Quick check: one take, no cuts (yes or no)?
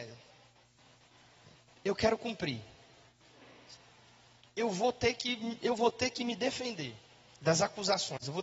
yes